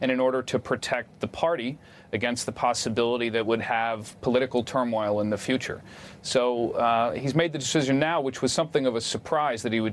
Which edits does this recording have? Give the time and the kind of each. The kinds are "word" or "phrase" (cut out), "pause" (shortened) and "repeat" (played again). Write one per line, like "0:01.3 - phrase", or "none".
none